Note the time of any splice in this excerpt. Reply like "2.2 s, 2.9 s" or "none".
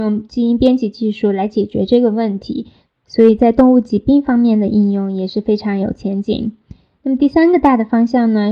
2.9 s